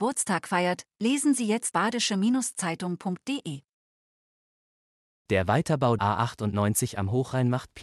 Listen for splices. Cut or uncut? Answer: cut